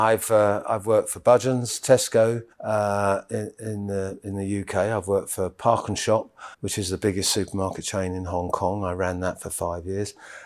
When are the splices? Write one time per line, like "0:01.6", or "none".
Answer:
0:02.5
0:06.5